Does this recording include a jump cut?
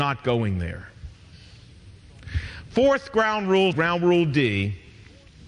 yes; 1 cut; at 3.7 s

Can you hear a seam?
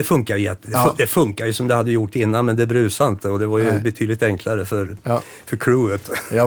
no; 0 cuts

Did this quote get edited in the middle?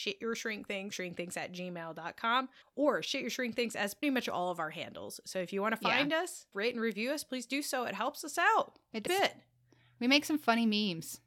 yes; 5 cuts; at 0.9 s, 2.6 s, 4.0 s, 6.5 s, 9.1 s

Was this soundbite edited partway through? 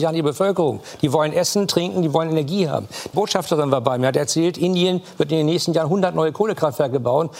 yes; 1 cut; at 3.1 s

